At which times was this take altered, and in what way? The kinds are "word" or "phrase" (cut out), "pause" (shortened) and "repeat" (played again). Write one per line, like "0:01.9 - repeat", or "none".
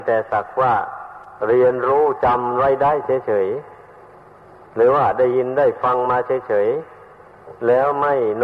none